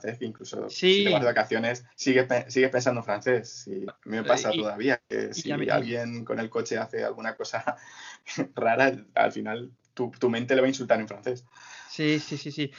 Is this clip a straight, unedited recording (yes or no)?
no